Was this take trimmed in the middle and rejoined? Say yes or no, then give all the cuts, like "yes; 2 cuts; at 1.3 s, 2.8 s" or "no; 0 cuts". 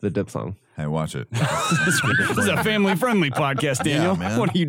no; 0 cuts